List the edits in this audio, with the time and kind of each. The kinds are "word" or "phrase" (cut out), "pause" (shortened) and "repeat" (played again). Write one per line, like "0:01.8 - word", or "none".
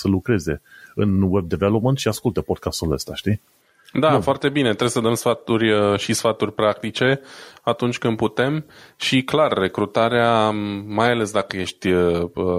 none